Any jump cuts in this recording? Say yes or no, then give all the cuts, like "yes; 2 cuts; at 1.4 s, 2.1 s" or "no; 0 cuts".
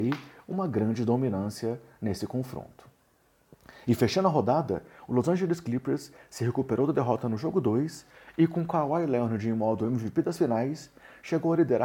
no; 0 cuts